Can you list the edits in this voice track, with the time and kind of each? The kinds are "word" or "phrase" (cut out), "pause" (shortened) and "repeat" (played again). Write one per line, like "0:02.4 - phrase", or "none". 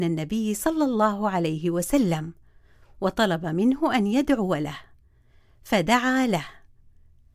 none